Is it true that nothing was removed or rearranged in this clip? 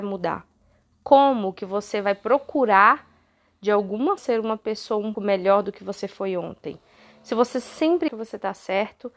no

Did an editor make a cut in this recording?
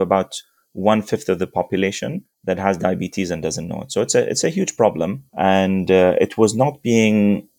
yes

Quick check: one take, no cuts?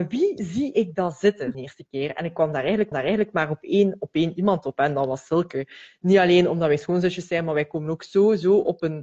no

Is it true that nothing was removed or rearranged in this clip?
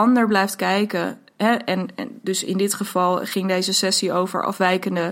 yes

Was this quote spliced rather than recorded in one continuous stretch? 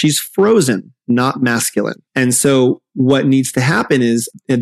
yes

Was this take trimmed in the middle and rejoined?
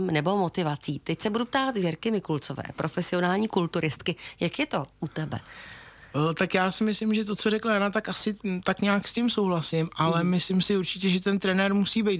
no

